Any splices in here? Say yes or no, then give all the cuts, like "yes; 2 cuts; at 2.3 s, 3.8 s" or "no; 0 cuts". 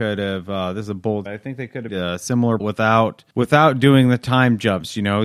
yes; 4 cuts; at 1.3 s, 1.9 s, 2.6 s, 3.3 s